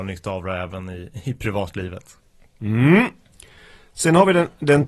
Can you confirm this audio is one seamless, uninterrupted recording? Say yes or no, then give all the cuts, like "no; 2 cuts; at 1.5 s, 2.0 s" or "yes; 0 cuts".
yes; 0 cuts